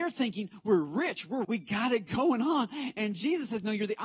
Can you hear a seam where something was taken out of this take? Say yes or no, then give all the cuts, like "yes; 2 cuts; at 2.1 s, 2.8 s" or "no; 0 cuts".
yes; 1 cut; at 1.4 s